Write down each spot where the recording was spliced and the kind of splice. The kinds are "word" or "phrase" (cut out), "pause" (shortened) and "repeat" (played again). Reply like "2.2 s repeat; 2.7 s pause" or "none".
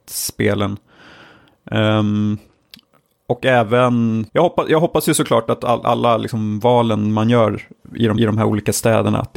4.3 s pause; 8.2 s repeat